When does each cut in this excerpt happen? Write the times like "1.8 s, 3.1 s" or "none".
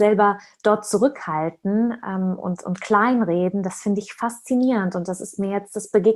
none